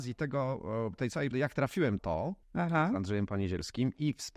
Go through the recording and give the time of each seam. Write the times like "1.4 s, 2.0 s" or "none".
1.3 s, 2.0 s, 2.4 s